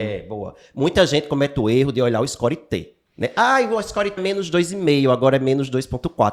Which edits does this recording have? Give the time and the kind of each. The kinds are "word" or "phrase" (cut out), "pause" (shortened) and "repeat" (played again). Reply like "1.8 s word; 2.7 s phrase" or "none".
3.0 s pause; 4.2 s word